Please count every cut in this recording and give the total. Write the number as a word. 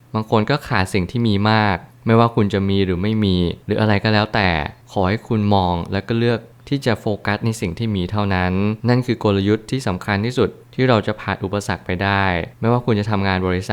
two